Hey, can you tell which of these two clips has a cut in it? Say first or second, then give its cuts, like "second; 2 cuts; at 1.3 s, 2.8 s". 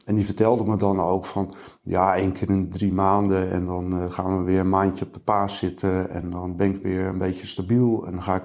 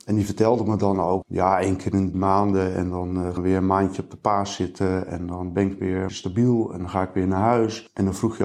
second; 4 cuts; at 1.2 s, 2.1 s, 3.4 s, 6.1 s